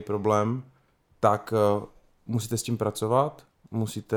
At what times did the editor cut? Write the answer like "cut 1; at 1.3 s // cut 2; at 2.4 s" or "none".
none